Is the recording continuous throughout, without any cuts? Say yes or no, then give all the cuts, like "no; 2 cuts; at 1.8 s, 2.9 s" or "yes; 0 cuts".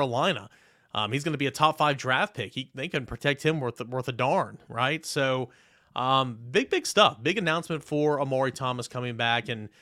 yes; 0 cuts